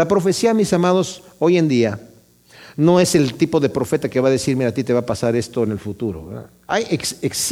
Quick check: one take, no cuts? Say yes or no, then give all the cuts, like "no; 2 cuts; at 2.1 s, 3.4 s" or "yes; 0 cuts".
yes; 0 cuts